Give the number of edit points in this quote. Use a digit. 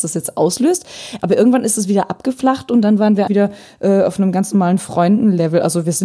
1